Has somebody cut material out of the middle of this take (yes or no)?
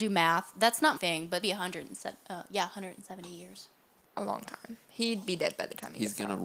yes